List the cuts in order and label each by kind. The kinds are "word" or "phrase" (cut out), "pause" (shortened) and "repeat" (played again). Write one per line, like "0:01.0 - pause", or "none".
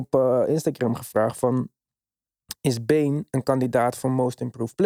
none